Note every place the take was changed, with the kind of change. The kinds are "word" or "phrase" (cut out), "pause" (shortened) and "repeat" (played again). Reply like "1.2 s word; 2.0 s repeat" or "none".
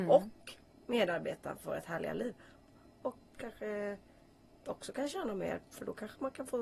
3.2 s word